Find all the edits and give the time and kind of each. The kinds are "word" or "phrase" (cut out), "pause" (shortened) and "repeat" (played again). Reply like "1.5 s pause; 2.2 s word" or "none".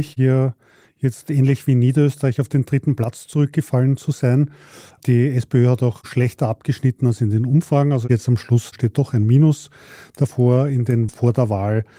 11.1 s word